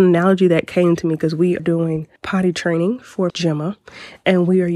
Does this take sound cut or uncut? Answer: cut